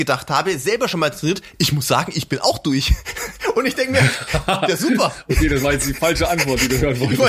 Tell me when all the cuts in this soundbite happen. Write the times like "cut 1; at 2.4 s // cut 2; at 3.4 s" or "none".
none